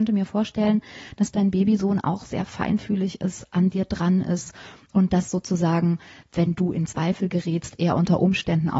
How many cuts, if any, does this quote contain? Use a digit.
0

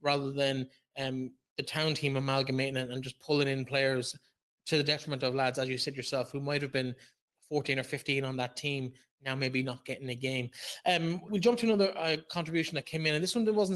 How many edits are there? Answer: 1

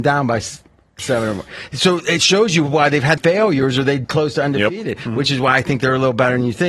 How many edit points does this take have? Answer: 2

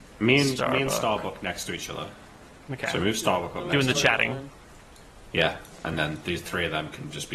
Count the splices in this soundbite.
0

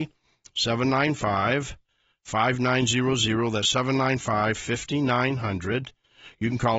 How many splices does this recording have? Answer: 0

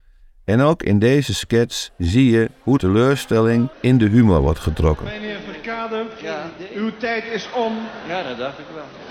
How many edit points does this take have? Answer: 2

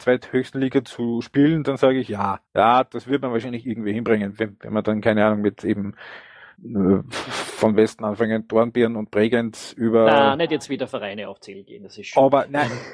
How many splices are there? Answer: 0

